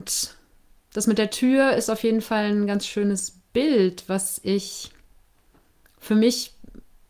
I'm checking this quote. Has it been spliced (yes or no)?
no